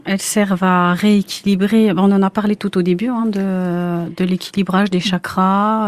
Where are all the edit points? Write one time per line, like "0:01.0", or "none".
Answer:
none